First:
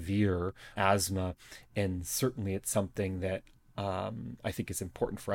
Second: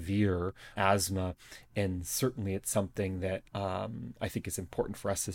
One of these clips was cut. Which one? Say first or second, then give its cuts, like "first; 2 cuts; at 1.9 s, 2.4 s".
second; 1 cut; at 3.5 s